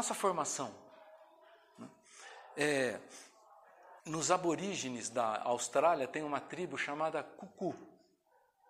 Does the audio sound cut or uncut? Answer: cut